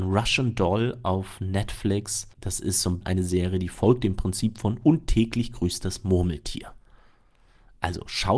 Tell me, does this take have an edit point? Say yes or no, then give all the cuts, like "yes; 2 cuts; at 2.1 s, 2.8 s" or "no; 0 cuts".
yes; 2 cuts; at 2.3 s, 3.0 s